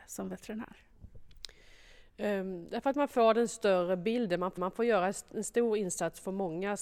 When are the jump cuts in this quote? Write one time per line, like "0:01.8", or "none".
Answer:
0:04.6